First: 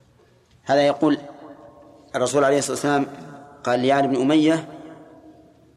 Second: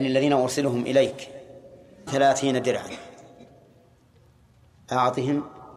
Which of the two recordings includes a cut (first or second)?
second